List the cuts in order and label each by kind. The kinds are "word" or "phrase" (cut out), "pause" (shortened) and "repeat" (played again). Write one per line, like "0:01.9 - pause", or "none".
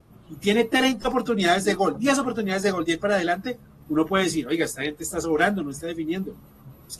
none